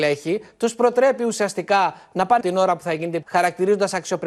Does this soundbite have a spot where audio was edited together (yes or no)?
yes